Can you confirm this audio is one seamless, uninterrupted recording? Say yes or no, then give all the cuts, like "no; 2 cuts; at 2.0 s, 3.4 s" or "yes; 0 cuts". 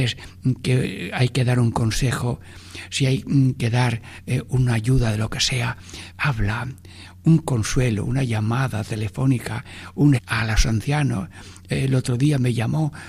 no; 2 cuts; at 6.1 s, 10.2 s